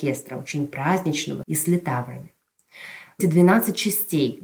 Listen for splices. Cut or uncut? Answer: cut